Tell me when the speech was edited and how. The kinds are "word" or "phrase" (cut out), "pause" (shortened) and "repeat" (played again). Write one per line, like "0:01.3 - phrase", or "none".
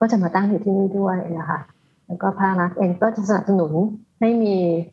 none